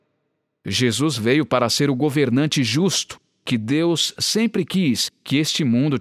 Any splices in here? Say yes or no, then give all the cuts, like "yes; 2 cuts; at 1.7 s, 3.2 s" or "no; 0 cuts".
no; 0 cuts